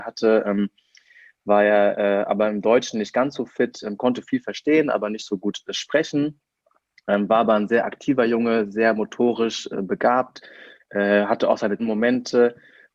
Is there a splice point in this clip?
yes; 1 cut; at 11.8 s

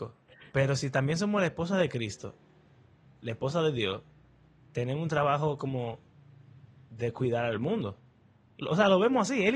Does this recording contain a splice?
yes; 1 cut; at 8.6 s

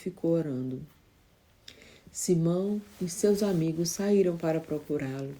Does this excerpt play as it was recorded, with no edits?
yes; 0 cuts

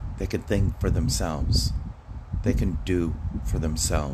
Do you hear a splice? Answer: no; 0 cuts

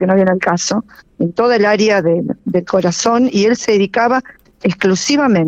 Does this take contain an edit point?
no; 0 cuts

